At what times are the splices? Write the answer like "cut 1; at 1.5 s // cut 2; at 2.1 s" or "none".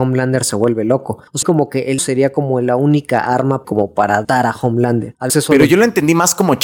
cut 1; at 1.4 s // cut 2; at 2.0 s // cut 3; at 3.6 s // cut 4; at 4.2 s // cut 5; at 5.3 s